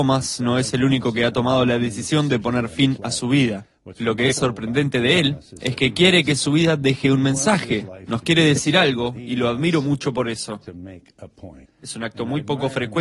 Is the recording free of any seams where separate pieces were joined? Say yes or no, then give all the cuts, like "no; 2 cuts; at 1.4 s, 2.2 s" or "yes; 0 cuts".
no; 1 cut; at 11.6 s